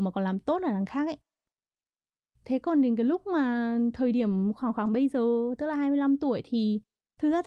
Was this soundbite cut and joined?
no; 0 cuts

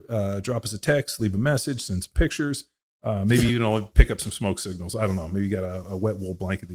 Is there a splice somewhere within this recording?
no; 0 cuts

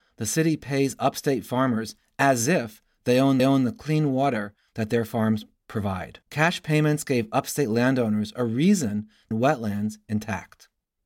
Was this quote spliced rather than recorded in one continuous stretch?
yes; 3 cuts; at 3.4 s, 6.2 s, 9.3 s

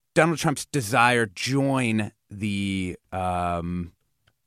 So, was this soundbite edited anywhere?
yes; 1 cut; at 1.3 s

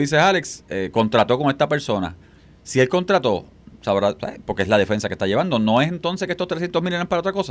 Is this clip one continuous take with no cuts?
yes; 0 cuts

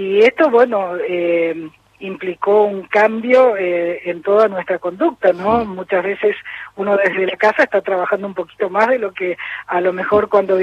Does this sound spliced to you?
no; 0 cuts

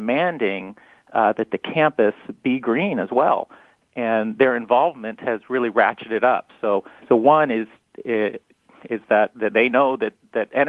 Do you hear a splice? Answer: yes; 1 cut; at 7.0 s

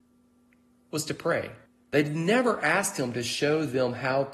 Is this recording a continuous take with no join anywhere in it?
no; 1 cut; at 1.7 s

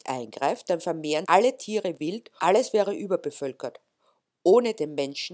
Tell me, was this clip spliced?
yes; 3 cuts; at 1.2 s, 2.0 s, 2.4 s

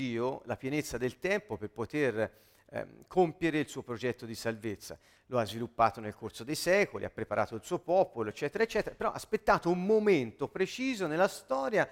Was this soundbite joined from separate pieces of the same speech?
no; 0 cuts

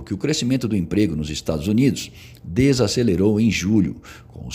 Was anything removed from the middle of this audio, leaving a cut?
no; 0 cuts

